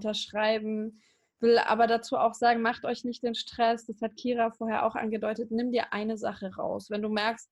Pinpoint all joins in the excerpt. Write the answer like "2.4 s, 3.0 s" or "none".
none

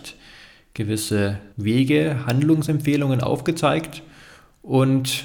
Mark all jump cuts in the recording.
1.5 s

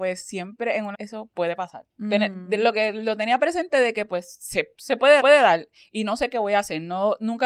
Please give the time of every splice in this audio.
0.9 s, 1.9 s, 5.2 s

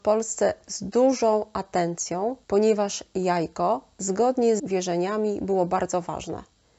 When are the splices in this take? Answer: 2.4 s, 4.6 s

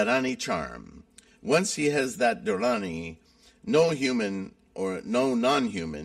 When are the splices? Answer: none

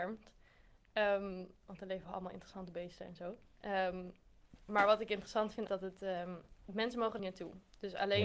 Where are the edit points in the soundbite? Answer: 3.5 s, 5.7 s, 6.6 s, 7.2 s

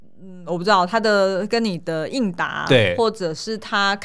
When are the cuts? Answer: none

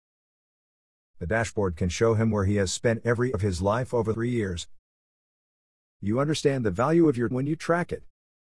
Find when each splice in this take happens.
3.3 s, 4.1 s, 7.3 s

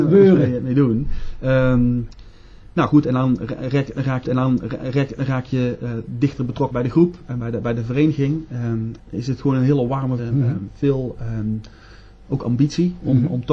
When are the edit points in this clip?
4.2 s, 6.7 s, 9.0 s, 10.2 s, 12.2 s

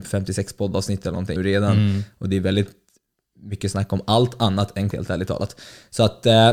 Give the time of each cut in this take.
1.4 s, 4.9 s

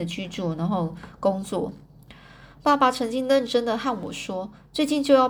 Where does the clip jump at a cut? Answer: 2.5 s

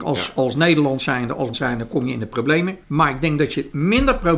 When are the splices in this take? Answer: 1.5 s, 2.8 s

